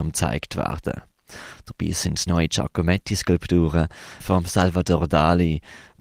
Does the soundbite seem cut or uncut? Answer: cut